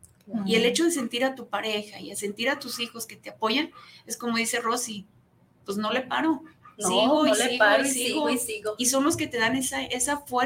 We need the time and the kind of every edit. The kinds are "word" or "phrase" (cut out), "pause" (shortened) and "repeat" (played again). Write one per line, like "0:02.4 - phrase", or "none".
none